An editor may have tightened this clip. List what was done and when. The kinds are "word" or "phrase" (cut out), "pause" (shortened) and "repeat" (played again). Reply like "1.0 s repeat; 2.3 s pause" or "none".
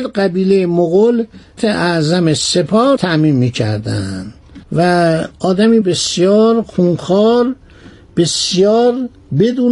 1.6 s word; 3.0 s word; 4.6 s pause; 5.8 s word